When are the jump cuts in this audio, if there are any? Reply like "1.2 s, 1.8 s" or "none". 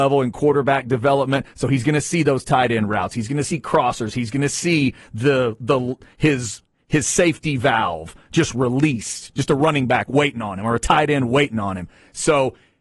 none